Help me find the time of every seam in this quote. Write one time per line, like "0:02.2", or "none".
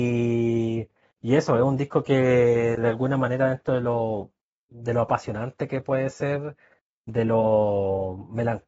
none